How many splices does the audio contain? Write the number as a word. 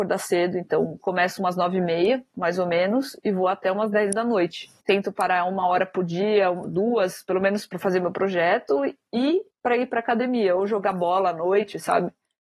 two